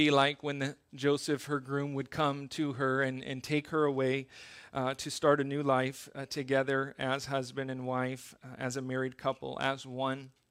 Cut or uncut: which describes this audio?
uncut